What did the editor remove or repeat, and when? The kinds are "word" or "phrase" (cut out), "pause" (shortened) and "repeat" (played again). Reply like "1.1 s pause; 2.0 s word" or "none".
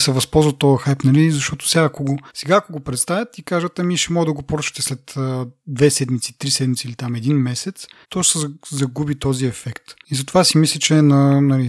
2.3 s pause; 8.0 s pause